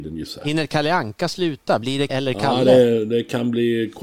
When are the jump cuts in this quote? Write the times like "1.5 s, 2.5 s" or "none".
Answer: 2.1 s